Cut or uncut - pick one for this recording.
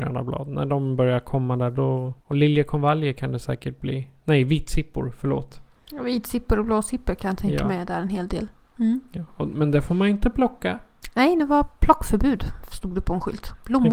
cut